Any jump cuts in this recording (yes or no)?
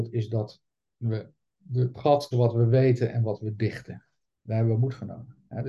yes